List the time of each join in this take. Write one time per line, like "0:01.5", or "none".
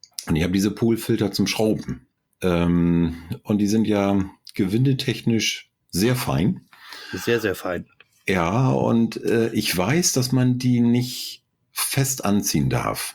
none

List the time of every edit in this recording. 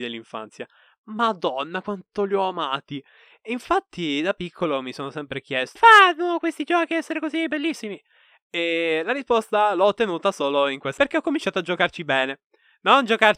0:05.8
0:11.0

